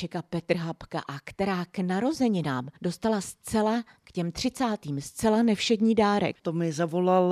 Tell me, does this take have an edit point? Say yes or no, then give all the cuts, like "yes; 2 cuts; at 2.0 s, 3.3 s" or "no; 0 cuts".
yes; 2 cuts; at 2.8 s, 6.4 s